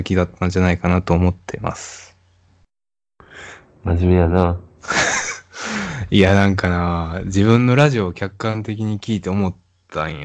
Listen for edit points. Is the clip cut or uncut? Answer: uncut